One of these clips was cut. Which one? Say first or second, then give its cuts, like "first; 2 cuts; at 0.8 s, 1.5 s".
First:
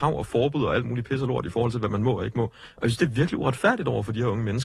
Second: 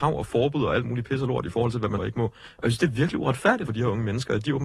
second; 2 cuts; at 2.0 s, 3.7 s